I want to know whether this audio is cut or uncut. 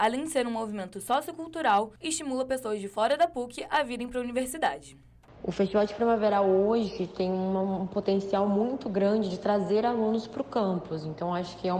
uncut